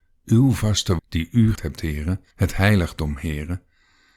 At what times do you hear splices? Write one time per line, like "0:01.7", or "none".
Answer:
0:01.0
0:01.5
0:02.3